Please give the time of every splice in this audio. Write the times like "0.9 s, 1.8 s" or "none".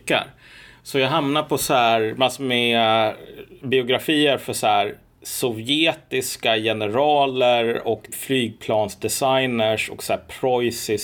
8.1 s